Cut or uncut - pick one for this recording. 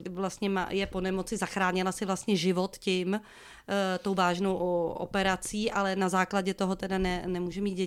uncut